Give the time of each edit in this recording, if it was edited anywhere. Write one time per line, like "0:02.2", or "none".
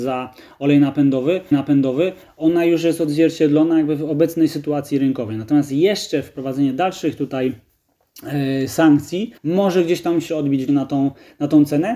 0:01.5
0:09.4
0:10.3
0:10.7